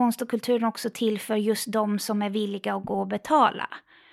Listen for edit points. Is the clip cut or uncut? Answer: uncut